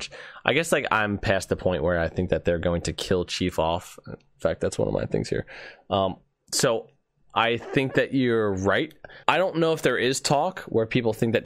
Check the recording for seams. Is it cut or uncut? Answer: cut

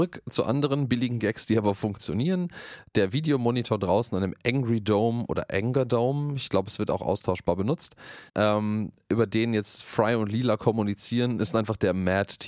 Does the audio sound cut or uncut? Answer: cut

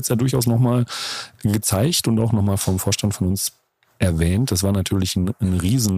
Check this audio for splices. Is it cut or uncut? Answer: uncut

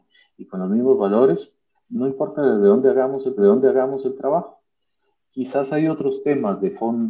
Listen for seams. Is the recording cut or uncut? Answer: cut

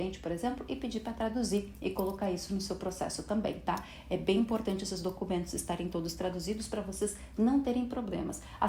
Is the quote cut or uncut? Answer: uncut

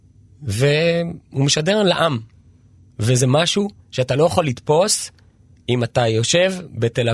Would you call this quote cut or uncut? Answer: cut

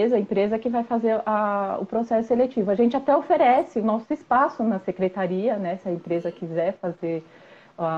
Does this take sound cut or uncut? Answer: uncut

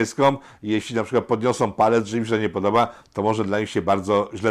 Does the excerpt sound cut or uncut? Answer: uncut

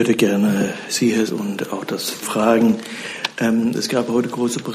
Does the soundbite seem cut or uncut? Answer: cut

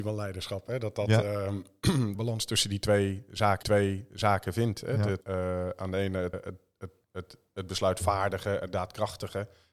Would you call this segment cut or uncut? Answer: cut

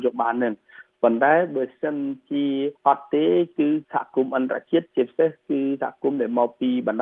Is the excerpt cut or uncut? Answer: cut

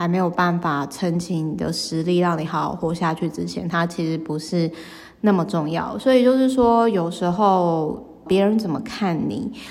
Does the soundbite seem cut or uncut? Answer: cut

